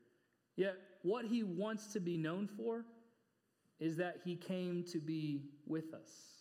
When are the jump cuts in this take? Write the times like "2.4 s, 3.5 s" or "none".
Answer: none